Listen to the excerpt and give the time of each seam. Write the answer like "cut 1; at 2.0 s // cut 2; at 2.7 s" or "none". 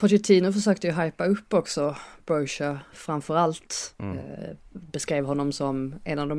none